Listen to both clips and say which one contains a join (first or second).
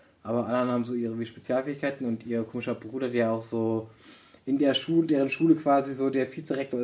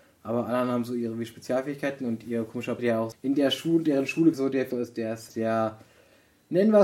second